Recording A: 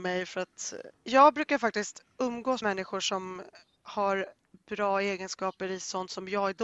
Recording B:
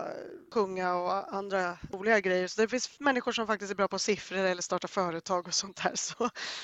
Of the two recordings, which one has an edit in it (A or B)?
A